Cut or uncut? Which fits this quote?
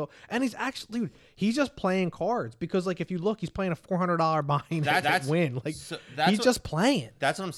cut